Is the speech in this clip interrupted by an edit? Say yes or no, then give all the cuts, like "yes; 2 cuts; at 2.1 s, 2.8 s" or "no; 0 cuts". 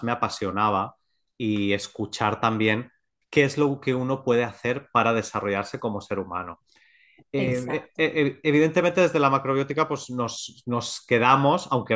no; 0 cuts